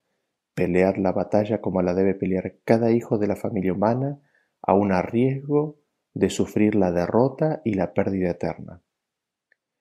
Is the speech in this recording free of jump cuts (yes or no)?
yes